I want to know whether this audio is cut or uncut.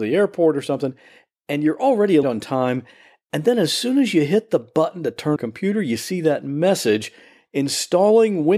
cut